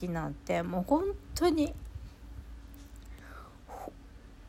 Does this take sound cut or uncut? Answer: uncut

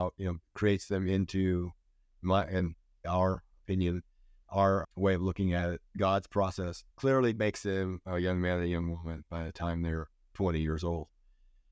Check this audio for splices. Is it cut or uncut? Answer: cut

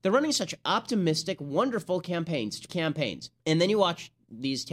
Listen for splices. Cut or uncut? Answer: cut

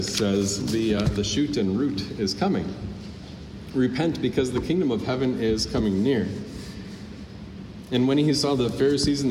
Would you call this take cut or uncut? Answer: uncut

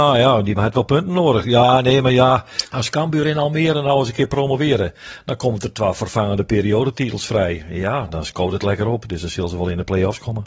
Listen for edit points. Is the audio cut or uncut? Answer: uncut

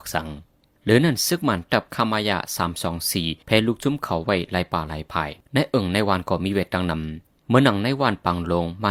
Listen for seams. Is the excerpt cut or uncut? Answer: cut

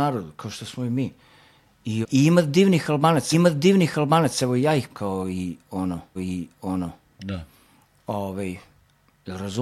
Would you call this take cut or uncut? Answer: cut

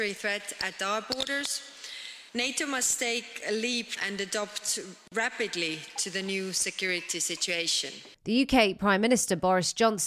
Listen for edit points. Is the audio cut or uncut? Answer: cut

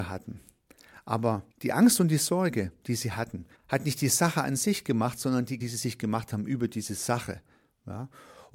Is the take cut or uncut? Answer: cut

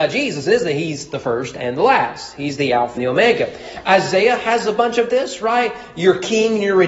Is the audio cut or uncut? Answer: cut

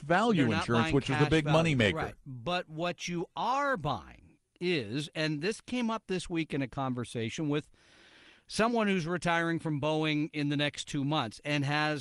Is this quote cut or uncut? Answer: uncut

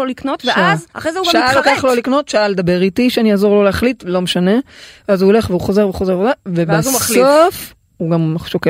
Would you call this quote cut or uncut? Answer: cut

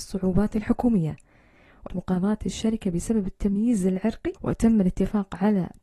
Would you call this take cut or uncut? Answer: cut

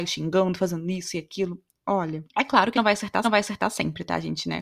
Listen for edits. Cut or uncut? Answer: cut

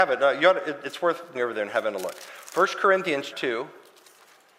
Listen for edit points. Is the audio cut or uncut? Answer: cut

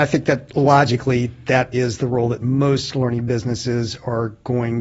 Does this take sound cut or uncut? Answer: cut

